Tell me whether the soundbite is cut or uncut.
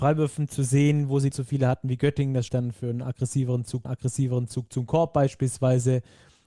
cut